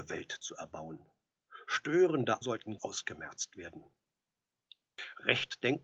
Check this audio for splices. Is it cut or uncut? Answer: cut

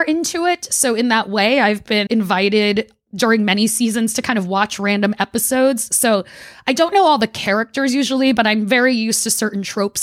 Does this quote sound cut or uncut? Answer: cut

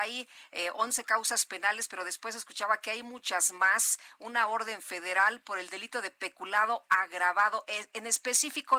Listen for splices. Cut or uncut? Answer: uncut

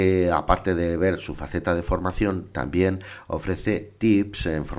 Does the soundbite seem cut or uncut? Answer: uncut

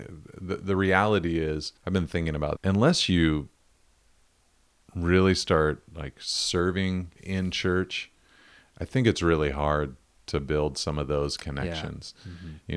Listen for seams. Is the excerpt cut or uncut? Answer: cut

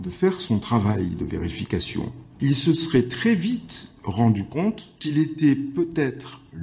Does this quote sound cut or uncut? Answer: uncut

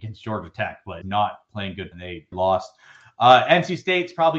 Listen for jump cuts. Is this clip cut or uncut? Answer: cut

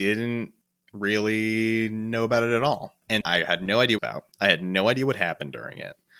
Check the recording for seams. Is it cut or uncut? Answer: cut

